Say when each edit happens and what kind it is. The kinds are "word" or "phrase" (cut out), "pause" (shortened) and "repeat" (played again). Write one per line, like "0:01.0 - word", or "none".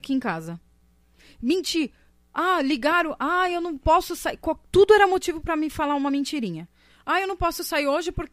none